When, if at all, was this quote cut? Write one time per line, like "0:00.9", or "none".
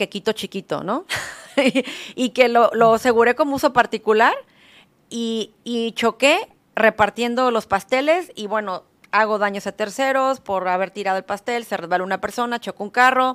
none